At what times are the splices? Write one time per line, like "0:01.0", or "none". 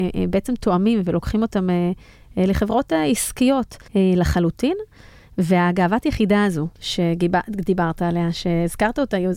0:03.9
0:06.7